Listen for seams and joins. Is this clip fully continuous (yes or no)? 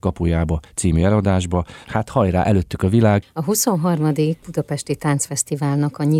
yes